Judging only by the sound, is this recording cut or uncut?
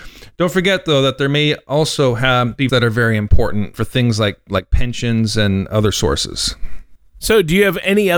cut